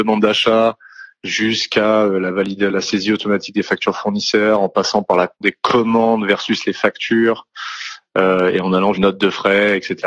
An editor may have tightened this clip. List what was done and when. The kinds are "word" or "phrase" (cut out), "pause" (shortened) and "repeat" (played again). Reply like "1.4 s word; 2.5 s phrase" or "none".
2.7 s word; 5.4 s word; 8.9 s word

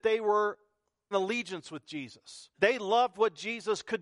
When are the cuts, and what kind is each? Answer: 1.1 s word; 2.5 s pause

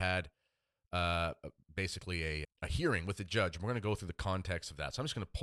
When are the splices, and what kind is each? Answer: 2.4 s word

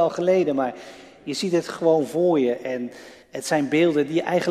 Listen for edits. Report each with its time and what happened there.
3.2 s pause

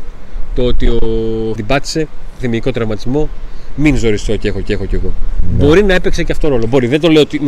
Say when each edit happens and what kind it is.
1.6 s word; 2.4 s word; 4.6 s repeat

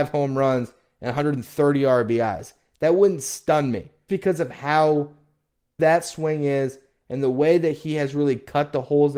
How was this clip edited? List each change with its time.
4.1 s word; 5.8 s word

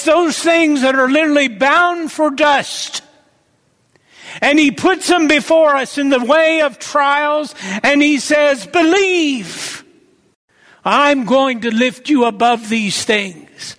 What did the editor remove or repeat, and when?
none

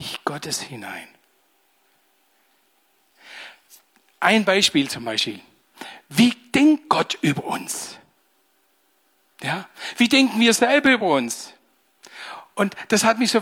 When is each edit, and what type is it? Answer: none

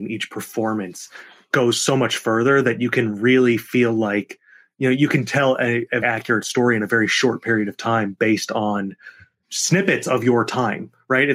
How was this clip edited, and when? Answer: 6.0 s word

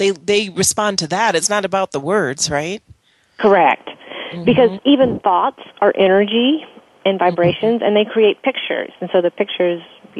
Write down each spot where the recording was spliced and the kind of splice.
none

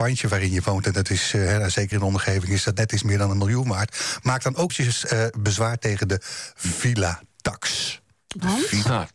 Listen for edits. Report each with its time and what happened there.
1.9 s word; 4.7 s word

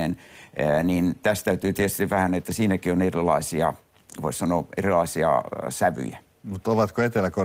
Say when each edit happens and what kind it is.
none

